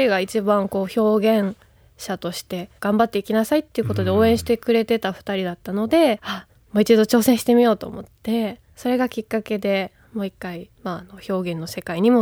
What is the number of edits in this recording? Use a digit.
4